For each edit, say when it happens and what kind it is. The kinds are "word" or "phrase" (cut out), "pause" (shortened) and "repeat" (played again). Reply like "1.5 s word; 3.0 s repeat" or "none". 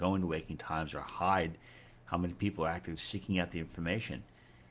none